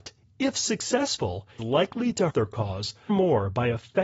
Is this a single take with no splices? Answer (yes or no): no